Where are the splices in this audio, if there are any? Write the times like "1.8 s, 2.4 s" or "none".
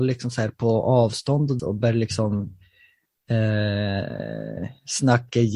1.6 s